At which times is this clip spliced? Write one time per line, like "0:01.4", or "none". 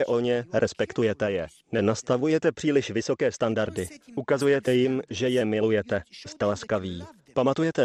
none